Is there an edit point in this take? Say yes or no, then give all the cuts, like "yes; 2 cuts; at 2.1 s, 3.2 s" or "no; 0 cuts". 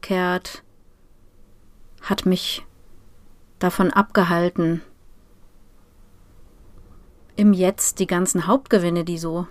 no; 0 cuts